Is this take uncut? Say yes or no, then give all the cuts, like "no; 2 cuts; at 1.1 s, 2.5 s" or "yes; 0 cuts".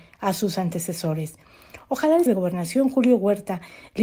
no; 1 cut; at 2.3 s